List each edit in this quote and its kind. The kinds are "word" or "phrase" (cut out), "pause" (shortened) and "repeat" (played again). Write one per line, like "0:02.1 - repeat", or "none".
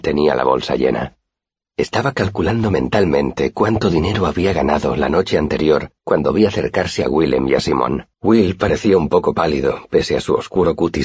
0:06.0 - pause
0:08.1 - pause

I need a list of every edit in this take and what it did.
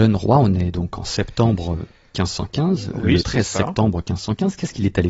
0:03.2 - word

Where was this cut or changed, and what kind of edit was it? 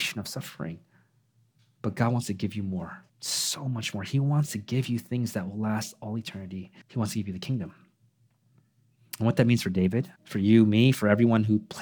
0:03.1 - pause
0:06.8 - pause
0:10.2 - pause

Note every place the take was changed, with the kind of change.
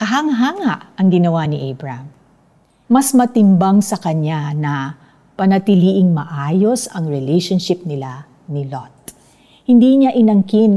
none

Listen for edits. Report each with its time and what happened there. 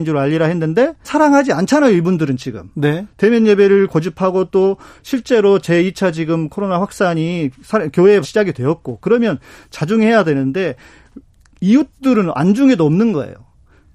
0:01.0 - word
0:08.2 - word

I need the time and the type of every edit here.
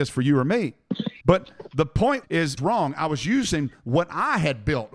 0:01.2 - pause
0:02.2 - word
0:02.6 - phrase

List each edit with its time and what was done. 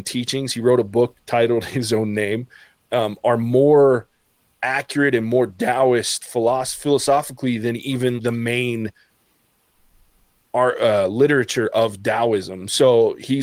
0:08.2 - word

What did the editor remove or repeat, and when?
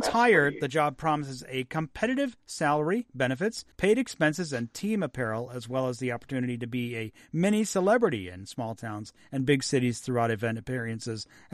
0:03.7 - pause

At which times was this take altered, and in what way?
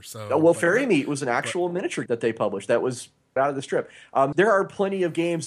0:02.1 - word
0:03.4 - word
0:04.3 - word

